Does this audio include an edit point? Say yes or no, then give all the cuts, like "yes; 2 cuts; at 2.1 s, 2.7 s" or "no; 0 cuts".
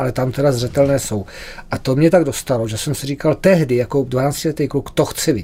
no; 0 cuts